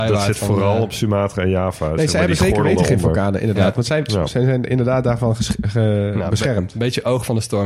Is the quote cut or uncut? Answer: uncut